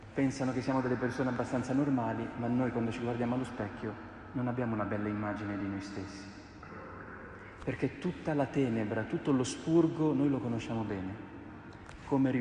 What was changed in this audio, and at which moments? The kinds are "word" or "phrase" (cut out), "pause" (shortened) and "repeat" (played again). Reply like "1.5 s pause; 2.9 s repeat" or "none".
none

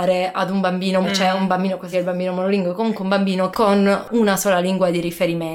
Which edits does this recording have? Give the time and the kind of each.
1.0 s word; 1.9 s word; 3.5 s word

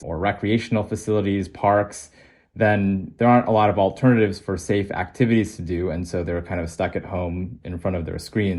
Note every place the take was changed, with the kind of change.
none

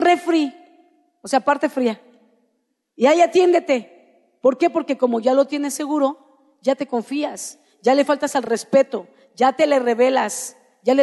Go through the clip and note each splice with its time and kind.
none

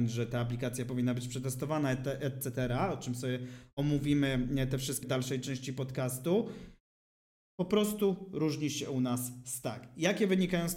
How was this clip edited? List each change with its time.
5.0 s word

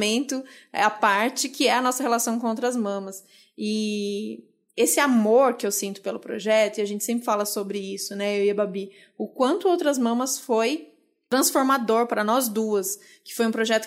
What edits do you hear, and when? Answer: none

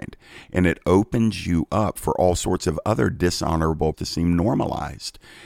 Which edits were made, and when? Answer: 3.9 s word

